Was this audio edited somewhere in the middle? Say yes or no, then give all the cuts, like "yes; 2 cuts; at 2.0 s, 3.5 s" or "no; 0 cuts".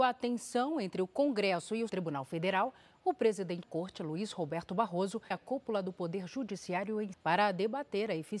yes; 4 cuts; at 1.9 s, 3.6 s, 5.3 s, 7.1 s